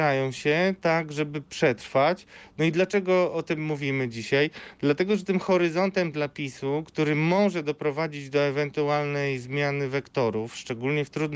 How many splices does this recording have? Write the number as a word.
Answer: zero